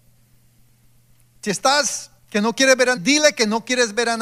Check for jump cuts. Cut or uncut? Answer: cut